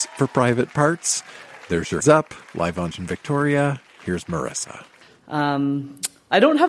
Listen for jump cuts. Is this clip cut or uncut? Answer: cut